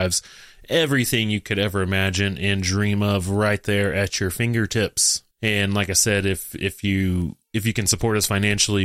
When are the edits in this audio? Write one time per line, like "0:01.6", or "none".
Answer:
0:05.3